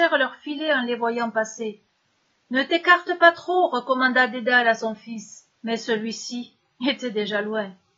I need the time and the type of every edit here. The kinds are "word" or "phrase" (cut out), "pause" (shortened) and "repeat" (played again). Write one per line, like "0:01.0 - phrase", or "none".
0:05.5 - pause